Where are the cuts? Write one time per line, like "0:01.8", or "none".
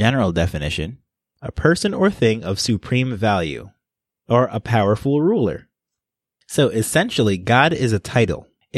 none